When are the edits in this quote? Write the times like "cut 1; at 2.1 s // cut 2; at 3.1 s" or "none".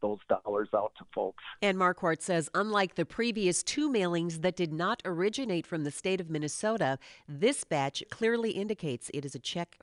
cut 1; at 8.0 s